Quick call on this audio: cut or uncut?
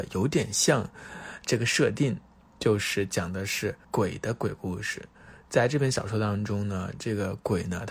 cut